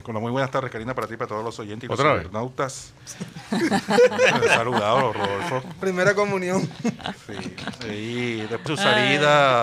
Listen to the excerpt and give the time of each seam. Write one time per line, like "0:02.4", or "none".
0:08.7